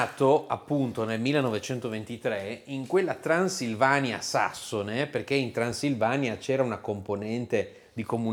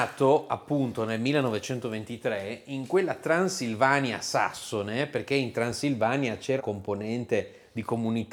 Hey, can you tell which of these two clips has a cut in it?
second; 1 cut; at 6.6 s

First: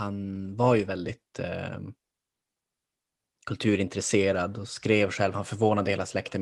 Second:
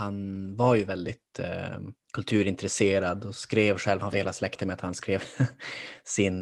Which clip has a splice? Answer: second; 2 cuts; at 2.0 s, 4.1 s

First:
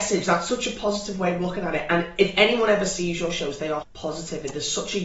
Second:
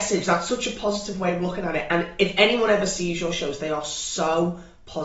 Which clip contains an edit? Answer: first; 1 cut; at 3.8 s

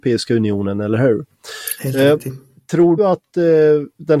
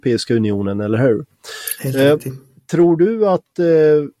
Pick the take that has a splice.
first; 1 cut; at 3.0 s

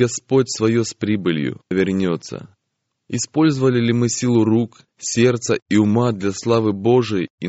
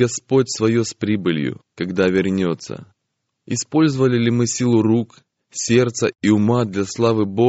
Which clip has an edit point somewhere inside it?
first; 2 cuts; at 1.7 s, 4.9 s

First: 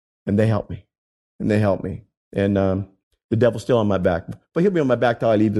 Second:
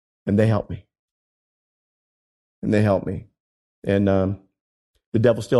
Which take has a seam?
first; 3 cuts; at 1.0 s, 2.2 s, 3.0 s

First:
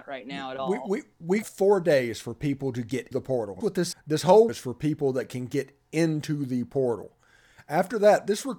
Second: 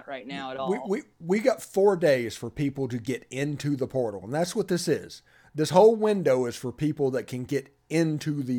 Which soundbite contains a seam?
first; 5 cuts; at 1.4 s, 3.1 s, 3.6 s, 3.9 s, 4.5 s

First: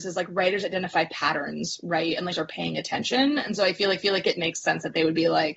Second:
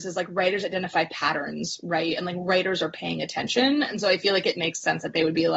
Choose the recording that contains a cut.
first; 2 cuts; at 2.3 s, 4.0 s

